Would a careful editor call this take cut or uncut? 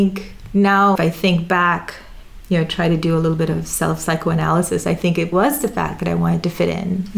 cut